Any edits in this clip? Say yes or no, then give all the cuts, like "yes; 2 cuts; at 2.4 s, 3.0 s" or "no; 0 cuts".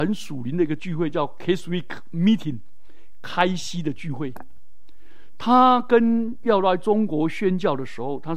no; 0 cuts